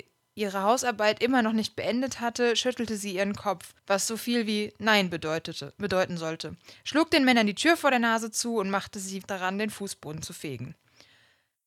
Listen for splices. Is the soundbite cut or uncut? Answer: cut